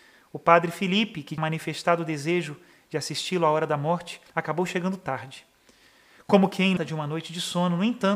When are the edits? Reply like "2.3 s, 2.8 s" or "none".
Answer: 1.4 s, 4.3 s, 6.8 s